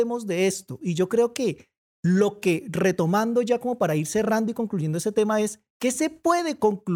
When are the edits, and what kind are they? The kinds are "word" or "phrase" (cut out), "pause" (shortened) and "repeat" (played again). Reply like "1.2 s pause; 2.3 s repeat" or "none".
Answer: none